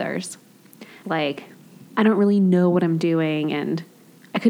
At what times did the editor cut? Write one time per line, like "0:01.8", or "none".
0:01.0
0:01.9